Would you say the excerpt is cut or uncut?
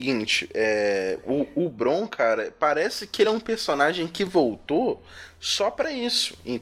uncut